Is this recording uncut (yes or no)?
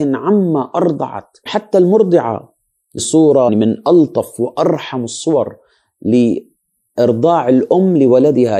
no